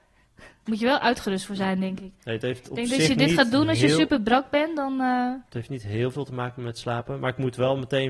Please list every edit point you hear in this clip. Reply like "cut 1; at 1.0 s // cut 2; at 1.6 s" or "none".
cut 1; at 5.5 s